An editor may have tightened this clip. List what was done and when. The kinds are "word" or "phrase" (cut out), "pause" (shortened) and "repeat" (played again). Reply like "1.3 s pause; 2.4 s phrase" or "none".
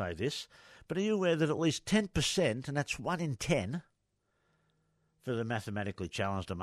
none